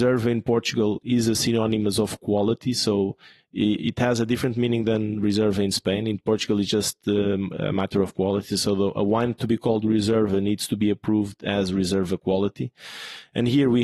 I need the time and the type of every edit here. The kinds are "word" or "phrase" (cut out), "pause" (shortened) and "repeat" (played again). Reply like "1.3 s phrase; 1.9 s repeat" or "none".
none